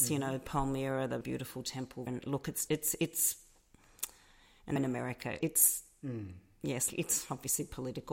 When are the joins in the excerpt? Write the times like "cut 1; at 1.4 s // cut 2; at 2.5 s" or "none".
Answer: cut 1; at 1.2 s // cut 2; at 2.1 s // cut 3; at 2.7 s // cut 4; at 4.8 s // cut 5; at 5.4 s // cut 6; at 6.9 s